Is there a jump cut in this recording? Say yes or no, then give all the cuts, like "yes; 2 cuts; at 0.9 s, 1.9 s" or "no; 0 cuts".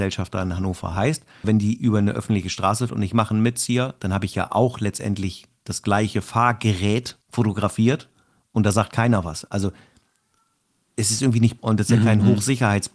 yes; 4 cuts; at 1.4 s, 2.9 s, 7.2 s, 11.6 s